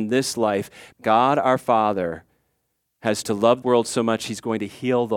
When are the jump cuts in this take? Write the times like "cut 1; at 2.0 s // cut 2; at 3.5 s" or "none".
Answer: cut 1; at 0.9 s // cut 2; at 3.2 s // cut 3; at 3.6 s